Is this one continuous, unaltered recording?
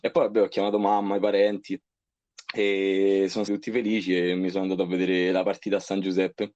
no; 1 cut; at 3.5 s

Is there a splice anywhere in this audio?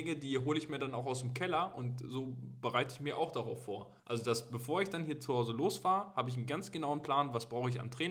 yes; 1 cut; at 4.0 s

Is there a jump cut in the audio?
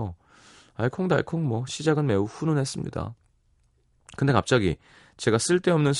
no; 0 cuts

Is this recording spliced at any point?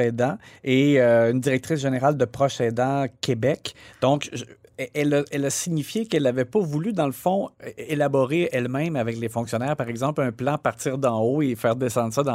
no; 0 cuts

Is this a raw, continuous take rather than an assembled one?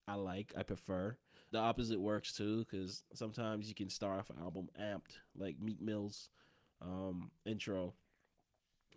no; 1 cut; at 1.5 s

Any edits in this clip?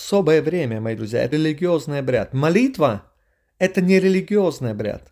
yes; 2 cuts; at 1.0 s, 1.3 s

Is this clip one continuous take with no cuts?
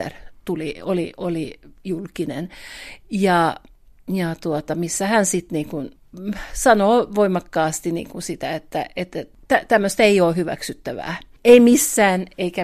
yes; 0 cuts

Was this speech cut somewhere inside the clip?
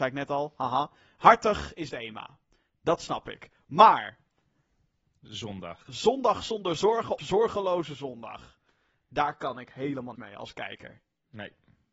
yes; 4 cuts; at 1.9 s, 5.3 s, 7.2 s, 10.2 s

